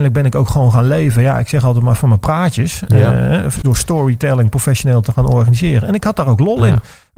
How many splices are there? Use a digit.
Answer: 1